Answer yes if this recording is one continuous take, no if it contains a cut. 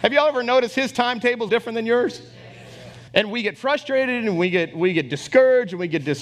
no